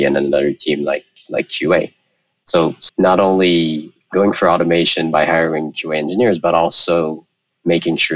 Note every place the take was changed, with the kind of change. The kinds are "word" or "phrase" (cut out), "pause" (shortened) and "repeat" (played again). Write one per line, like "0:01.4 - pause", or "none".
0:02.9 - word

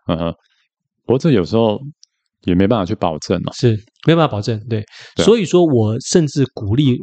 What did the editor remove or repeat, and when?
none

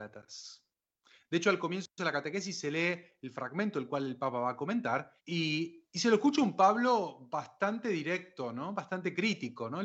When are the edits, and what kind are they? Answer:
0:05.2 - pause

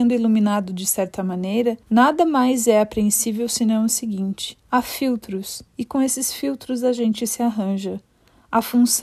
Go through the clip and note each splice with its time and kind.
0:01.8 - pause
0:04.6 - pause
0:05.7 - pause

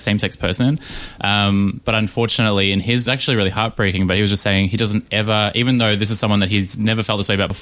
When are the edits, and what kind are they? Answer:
0:03.1 - phrase

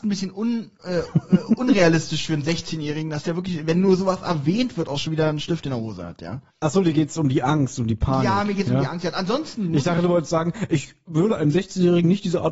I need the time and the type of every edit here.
0:06.5 - pause

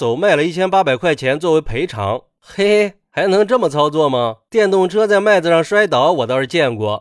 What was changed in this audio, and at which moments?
none

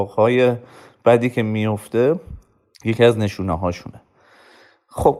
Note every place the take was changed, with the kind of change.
none

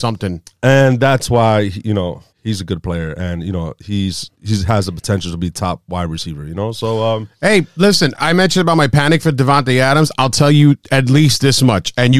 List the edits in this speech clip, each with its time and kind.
0:02.3 - pause
0:04.3 - pause
0:08.2 - word

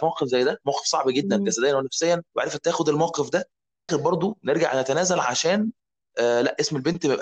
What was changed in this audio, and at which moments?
0:02.3 - pause
0:03.9 - phrase

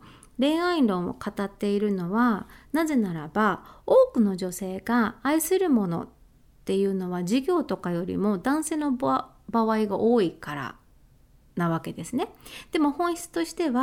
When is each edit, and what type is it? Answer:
none

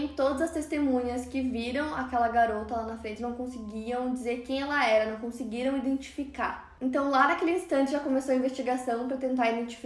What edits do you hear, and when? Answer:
none

